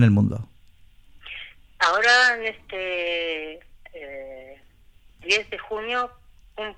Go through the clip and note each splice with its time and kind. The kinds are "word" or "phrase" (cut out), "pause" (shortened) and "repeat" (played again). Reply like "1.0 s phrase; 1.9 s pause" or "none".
none

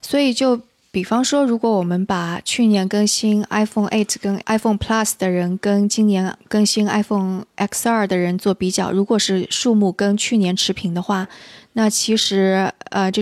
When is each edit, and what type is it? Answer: none

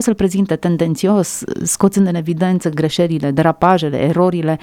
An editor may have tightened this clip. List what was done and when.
none

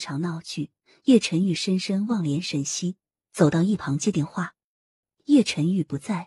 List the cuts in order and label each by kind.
none

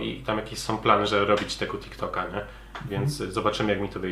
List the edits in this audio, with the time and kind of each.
none

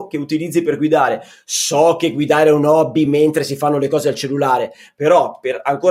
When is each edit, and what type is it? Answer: none

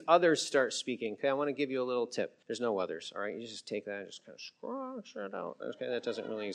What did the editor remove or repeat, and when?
2.4 s pause

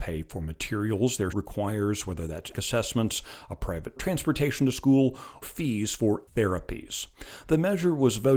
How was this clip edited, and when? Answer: 1.3 s word; 2.5 s word; 4.0 s word; 5.4 s word; 6.3 s word

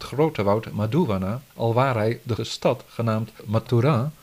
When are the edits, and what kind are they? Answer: 1.5 s pause; 2.4 s word

